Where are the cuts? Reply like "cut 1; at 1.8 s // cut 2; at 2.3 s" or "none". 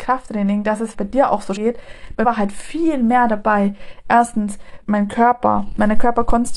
cut 1; at 0.9 s // cut 2; at 1.6 s // cut 3; at 2.2 s // cut 4; at 4.8 s